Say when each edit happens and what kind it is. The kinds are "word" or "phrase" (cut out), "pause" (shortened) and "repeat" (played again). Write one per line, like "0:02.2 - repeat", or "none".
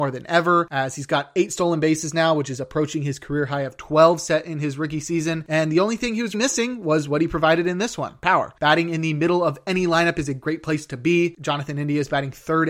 0:06.3 - word